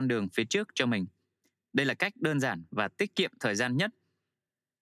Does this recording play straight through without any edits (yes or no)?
yes